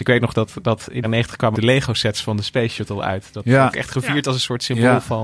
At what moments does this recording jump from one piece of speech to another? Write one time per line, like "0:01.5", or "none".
0:01.0
0:01.5
0:03.7